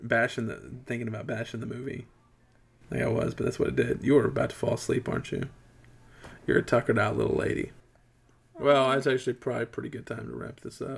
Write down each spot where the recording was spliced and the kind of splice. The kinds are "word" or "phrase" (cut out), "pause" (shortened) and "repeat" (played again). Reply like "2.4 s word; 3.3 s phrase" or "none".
none